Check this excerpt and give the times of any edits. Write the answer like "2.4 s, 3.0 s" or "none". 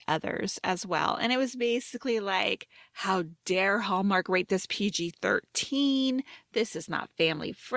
none

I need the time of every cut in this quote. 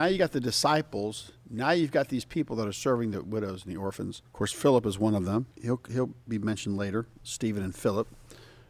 4.3 s, 5.5 s

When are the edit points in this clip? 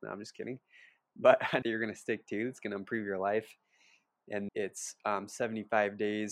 1.6 s, 4.5 s

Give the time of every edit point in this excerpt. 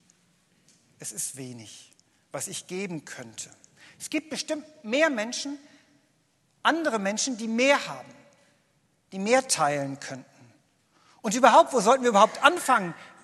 none

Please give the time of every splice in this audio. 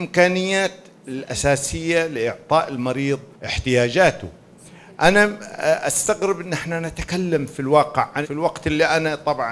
3.3 s, 8.2 s

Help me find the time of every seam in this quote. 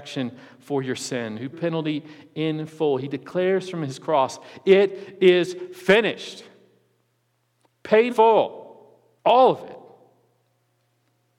1.5 s, 8.1 s, 9.2 s

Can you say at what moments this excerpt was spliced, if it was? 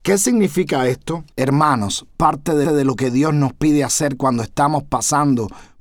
1.3 s, 2.6 s

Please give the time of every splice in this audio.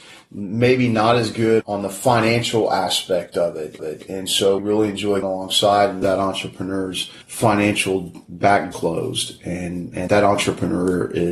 3.8 s, 4.6 s, 5.2 s, 6.0 s, 7.2 s, 8.7 s, 10.1 s

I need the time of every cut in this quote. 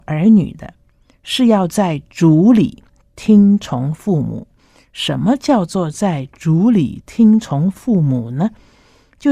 none

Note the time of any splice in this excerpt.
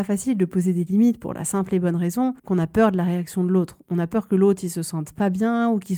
2.4 s

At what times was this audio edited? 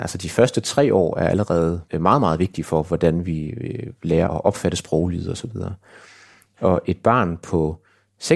1.9 s, 4.3 s

